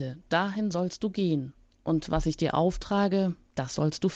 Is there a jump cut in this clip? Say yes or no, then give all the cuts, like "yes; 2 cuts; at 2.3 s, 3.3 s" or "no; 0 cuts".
no; 0 cuts